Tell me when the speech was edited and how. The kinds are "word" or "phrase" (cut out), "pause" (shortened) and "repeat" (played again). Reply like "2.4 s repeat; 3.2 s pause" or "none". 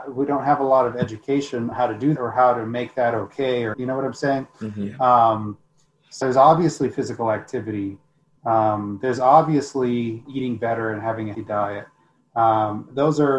1.7 s word; 2.2 s word; 3.7 s word; 6.2 s word; 10.2 s word; 11.3 s word